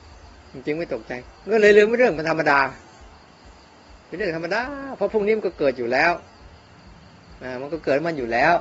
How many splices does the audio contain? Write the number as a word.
one